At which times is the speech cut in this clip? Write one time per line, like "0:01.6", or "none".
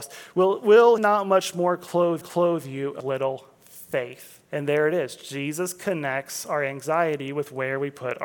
0:01.0
0:02.2
0:03.0
0:04.4